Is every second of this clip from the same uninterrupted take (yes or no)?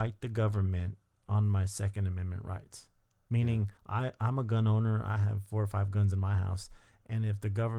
no